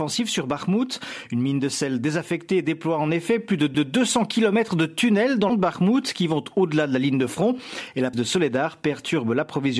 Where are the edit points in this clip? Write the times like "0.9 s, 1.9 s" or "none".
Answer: 3.7 s, 5.5 s, 8.1 s